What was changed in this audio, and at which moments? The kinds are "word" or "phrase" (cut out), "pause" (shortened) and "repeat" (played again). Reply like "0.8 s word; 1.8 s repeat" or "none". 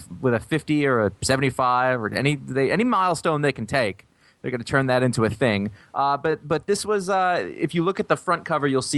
none

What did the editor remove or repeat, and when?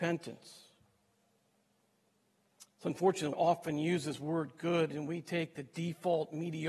3.3 s word

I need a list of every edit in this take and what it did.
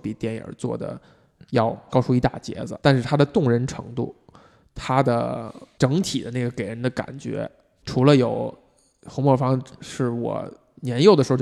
2.8 s word

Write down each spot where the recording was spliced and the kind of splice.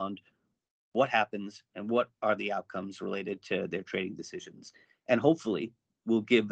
none

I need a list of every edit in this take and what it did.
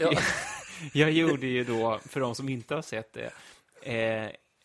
none

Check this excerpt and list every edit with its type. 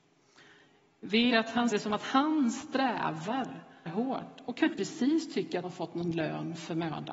1.3 s word; 1.7 s word; 3.9 s word; 4.7 s word; 5.6 s word

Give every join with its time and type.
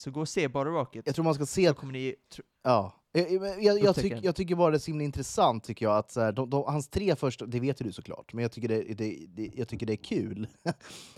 none

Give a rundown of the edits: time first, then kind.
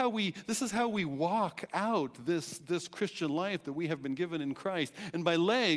none

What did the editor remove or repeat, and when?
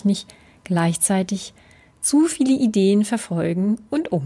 none

